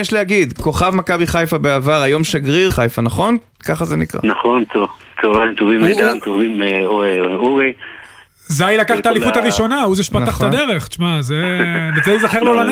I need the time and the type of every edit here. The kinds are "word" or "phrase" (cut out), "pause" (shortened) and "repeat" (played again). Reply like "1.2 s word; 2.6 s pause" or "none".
2.7 s word; 6.2 s word